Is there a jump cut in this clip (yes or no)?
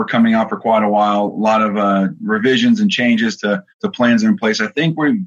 yes